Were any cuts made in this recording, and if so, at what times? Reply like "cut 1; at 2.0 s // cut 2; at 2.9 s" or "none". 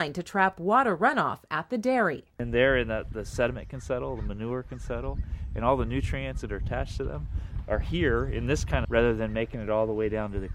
cut 1; at 6.5 s // cut 2; at 8.8 s